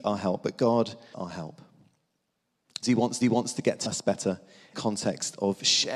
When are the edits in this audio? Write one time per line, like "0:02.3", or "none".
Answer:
0:01.1
0:02.8
0:03.2
0:03.9
0:04.7